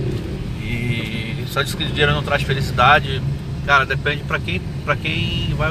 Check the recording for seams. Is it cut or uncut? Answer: uncut